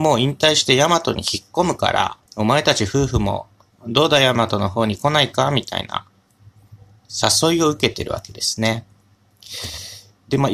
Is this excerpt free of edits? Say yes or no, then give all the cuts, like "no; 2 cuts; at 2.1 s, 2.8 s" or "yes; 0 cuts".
no; 1 cut; at 2.3 s